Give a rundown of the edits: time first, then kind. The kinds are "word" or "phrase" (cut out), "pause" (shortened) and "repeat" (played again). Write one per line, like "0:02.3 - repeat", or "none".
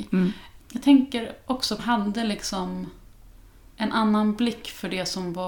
0:01.8 - phrase

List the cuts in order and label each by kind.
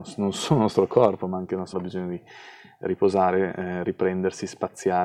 0:01.7 - word

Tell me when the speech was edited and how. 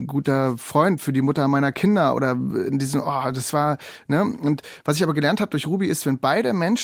none

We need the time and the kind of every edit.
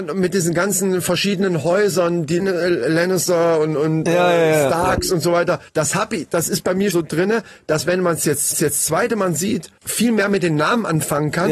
0:02.4 - word
0:05.7 - pause
0:06.9 - word
0:08.5 - repeat
0:09.8 - pause

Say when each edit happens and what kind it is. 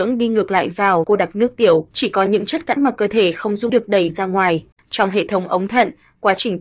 0:01.0 - word
0:01.9 - pause
0:02.8 - word
0:03.7 - phrase

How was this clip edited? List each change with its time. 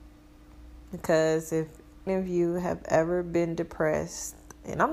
0:02.1 - word

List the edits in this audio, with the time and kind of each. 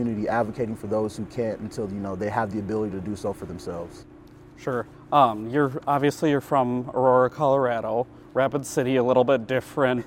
none

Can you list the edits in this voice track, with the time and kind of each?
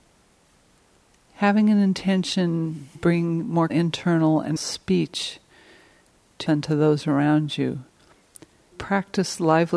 0:02.9 - word
0:03.7 - word
0:04.6 - word
0:06.5 - word
0:08.7 - word

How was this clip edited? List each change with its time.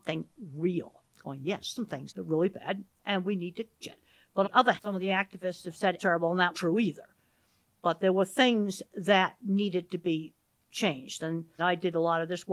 0:01.8 - word
0:02.1 - word
0:03.8 - word
0:04.4 - word
0:04.8 - word
0:06.0 - word
0:06.5 - word
0:11.6 - word

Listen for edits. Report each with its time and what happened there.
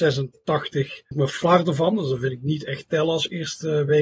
0:01.1 - word

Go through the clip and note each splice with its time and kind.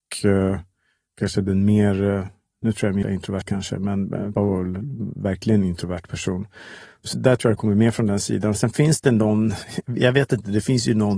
0:03.0 - word
0:03.5 - word
0:04.3 - word
0:07.1 - word

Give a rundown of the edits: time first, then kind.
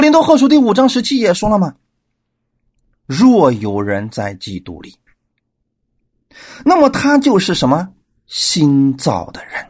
none

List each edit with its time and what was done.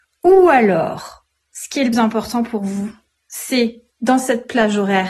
0:01.9 - word
0:03.9 - pause

